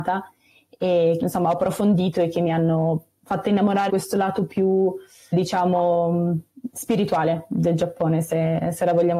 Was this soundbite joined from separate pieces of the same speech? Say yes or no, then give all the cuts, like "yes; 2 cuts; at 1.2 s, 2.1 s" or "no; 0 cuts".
yes; 3 cuts; at 1.2 s, 3.9 s, 5.3 s